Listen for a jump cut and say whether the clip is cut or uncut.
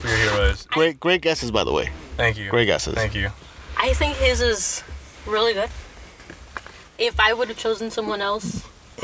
uncut